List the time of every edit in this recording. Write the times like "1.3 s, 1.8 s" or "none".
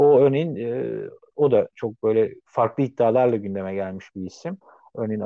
2.4 s